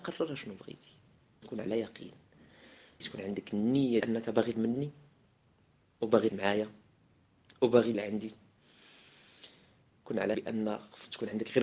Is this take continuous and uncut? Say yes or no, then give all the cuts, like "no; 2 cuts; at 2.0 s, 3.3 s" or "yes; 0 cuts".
no; 7 cuts; at 1.4 s, 3.0 s, 4.0 s, 4.5 s, 6.3 s, 7.9 s, 10.3 s